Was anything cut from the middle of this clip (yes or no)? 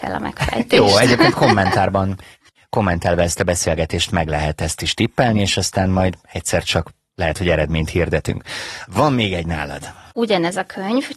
no